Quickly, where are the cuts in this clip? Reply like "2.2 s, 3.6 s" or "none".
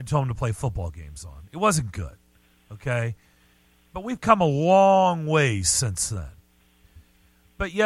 none